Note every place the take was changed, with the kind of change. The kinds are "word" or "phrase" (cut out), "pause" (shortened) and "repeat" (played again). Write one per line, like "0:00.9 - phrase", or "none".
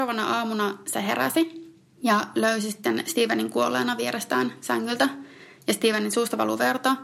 none